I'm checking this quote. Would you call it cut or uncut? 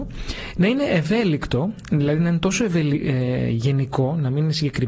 uncut